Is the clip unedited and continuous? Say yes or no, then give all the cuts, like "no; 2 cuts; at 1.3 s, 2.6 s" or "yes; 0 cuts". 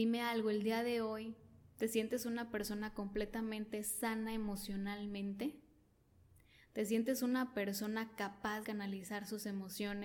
no; 1 cut; at 8.6 s